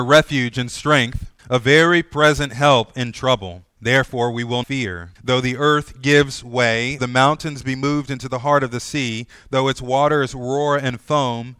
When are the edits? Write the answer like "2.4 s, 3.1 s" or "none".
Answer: 1.4 s, 3.7 s, 4.6 s, 5.2 s, 7.0 s